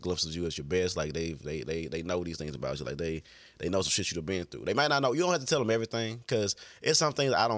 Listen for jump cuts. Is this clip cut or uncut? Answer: uncut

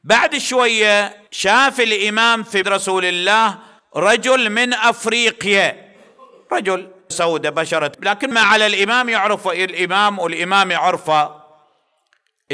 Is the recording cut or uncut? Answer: cut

